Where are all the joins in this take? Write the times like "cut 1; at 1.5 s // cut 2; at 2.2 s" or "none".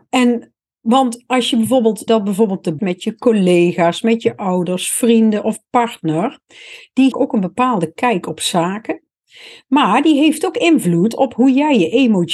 cut 1; at 2.1 s // cut 2; at 2.8 s // cut 3; at 7.1 s